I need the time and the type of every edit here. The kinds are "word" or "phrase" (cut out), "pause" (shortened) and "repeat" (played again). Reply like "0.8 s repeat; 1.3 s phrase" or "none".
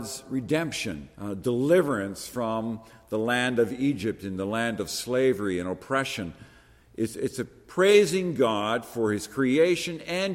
1.1 s pause